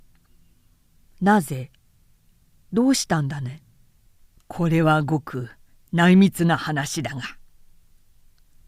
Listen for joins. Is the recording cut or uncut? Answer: uncut